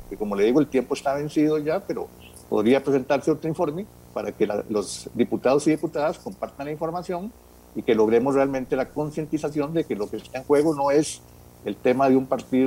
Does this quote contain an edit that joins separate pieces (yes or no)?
no